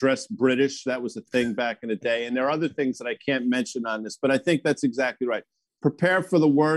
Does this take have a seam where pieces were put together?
no; 0 cuts

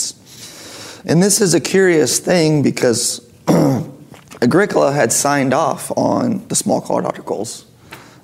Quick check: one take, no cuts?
yes; 0 cuts

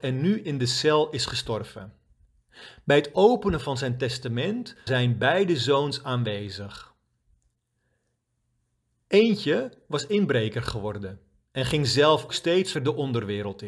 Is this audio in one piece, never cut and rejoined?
no; 3 cuts; at 4.9 s, 12.3 s, 12.7 s

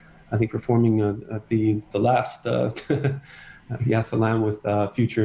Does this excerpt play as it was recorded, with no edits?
yes; 0 cuts

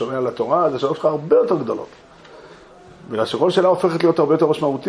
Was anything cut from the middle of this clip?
no; 0 cuts

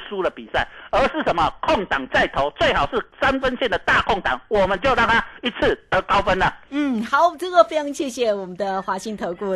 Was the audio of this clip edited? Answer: yes; 1 cut; at 3.1 s

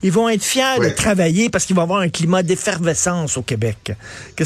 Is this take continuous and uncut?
yes; 0 cuts

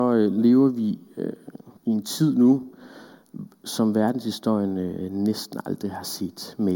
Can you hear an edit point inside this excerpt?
yes; 1 cut; at 1.8 s

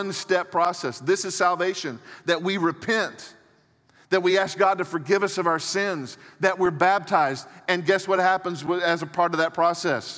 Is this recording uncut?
yes; 0 cuts

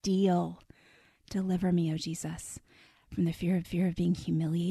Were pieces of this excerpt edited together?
yes; 1 cut; at 3.6 s

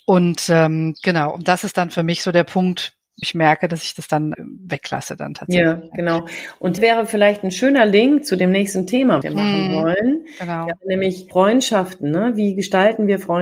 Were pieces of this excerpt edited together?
yes; 4 cuts; at 3.2 s, 4.3 s, 6.8 s, 9.2 s

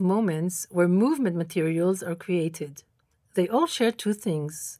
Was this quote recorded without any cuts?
yes; 0 cuts

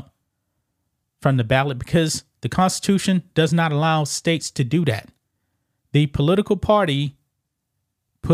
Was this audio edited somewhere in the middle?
no; 0 cuts

